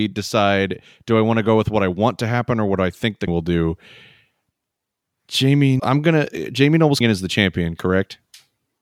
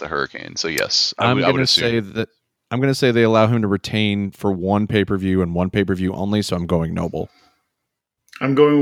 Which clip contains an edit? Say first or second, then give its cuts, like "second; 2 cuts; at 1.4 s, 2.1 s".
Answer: first; 3 cuts; at 3.3 s, 5.8 s, 7.0 s